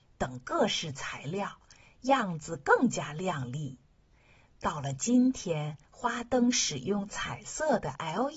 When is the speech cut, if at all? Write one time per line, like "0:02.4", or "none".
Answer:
0:05.8